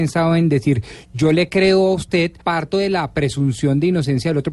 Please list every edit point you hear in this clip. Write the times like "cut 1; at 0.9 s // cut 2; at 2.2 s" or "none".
cut 1; at 2.4 s